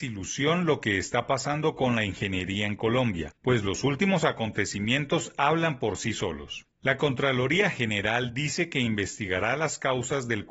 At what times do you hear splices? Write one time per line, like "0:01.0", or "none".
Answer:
none